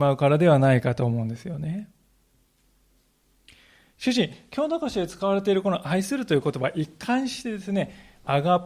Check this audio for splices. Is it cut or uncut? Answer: uncut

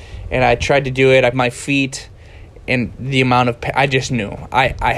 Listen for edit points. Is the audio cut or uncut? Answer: cut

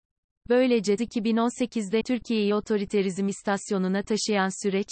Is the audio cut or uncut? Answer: cut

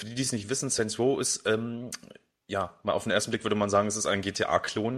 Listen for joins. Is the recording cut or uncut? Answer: uncut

